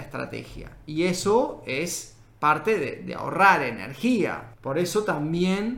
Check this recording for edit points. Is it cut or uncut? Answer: uncut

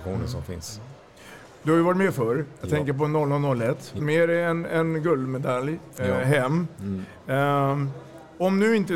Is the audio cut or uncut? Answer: cut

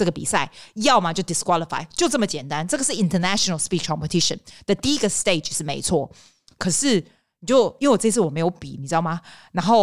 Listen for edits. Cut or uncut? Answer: uncut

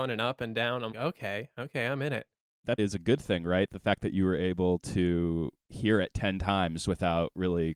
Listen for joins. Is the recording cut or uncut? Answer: cut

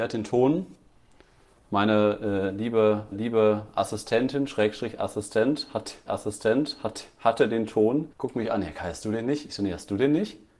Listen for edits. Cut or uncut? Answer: cut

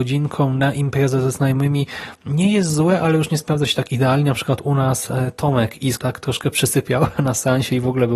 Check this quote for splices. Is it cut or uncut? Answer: cut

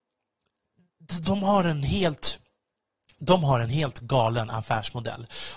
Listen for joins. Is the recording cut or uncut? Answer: uncut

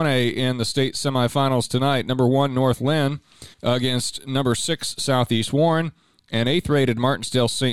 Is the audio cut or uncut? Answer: cut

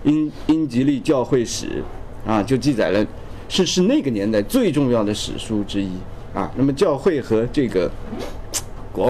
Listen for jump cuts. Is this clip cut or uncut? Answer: uncut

